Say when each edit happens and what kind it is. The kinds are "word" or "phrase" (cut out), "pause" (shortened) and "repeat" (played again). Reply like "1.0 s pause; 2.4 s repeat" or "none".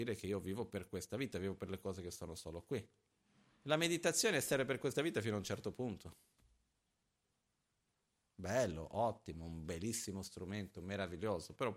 none

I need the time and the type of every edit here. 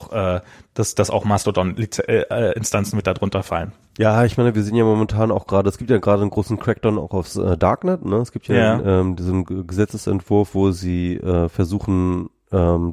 none

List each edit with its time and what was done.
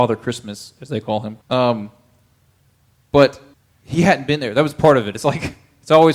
1.4 s pause; 3.5 s pause

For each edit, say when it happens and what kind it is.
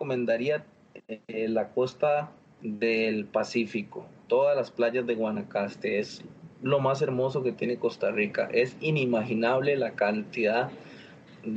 none

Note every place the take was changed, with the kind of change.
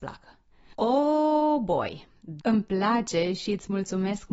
2.4 s word

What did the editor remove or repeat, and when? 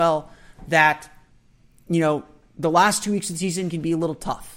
none

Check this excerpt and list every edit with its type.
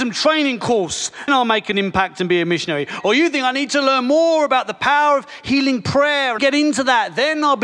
1.3 s word; 6.4 s phrase

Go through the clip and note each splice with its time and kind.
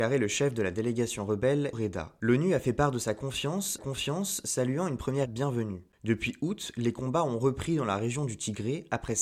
1.7 s word; 3.8 s repeat; 5.3 s word

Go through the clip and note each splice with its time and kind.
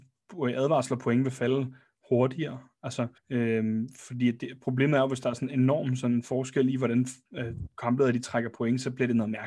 3.2 s pause; 7.7 s pause

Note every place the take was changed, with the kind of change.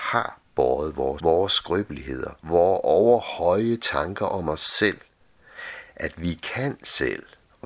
1.2 s word; 2.4 s pause

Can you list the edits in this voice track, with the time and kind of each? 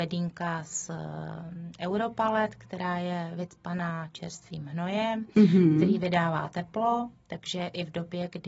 none

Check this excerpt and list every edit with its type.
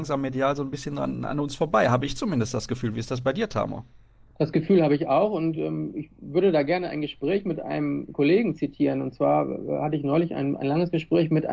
none

